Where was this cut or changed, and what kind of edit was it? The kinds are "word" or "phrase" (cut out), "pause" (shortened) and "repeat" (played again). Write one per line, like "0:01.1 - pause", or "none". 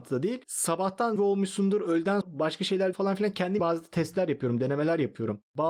0:01.2 - phrase
0:02.2 - word
0:02.9 - word
0:03.6 - word